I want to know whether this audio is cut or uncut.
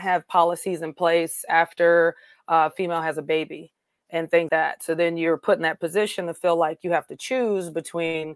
cut